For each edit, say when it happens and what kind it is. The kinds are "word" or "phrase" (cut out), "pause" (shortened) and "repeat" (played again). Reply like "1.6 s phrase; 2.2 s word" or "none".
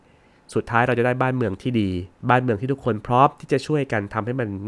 2.1 s pause